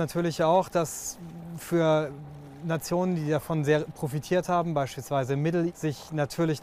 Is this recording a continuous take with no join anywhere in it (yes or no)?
no